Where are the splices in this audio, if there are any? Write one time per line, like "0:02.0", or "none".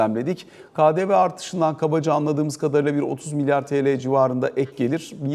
none